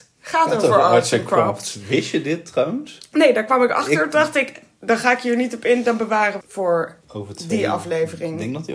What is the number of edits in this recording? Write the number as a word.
two